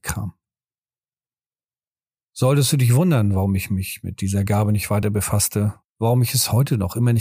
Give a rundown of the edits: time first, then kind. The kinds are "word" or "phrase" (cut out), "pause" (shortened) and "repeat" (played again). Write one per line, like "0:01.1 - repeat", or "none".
none